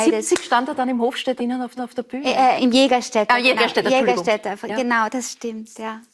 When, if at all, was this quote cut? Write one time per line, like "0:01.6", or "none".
0:01.4
0:01.8
0:02.6

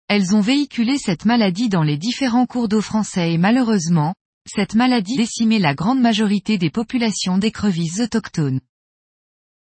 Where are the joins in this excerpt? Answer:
0:05.1

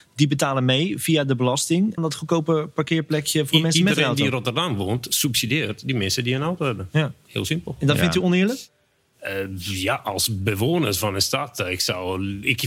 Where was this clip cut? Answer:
0:02.0

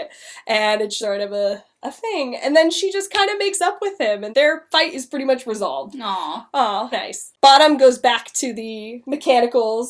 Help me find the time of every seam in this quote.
0:01.0
0:04.3
0:06.9

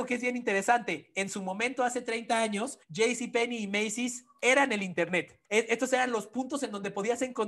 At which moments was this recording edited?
0:02.8
0:05.5

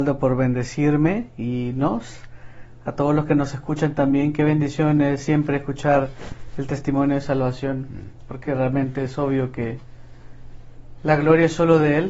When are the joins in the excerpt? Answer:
none

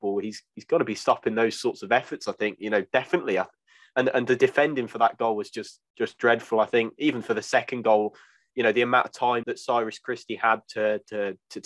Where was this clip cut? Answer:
0:09.4

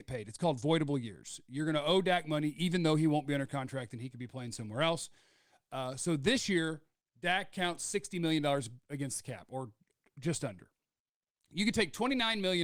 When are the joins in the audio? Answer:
none

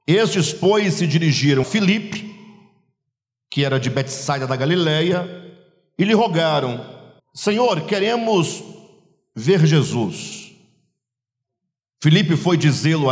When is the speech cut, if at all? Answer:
0:01.6
0:07.2

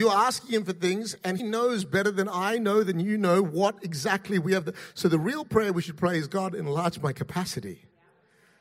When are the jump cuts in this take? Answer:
0:01.4

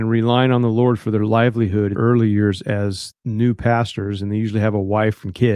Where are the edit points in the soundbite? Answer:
0:01.9

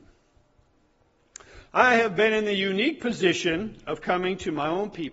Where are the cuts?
none

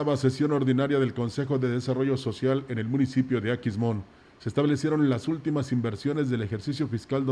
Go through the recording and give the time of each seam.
none

